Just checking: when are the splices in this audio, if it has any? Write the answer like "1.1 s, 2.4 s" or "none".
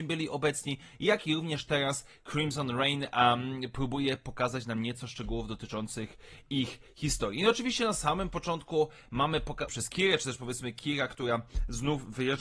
9.7 s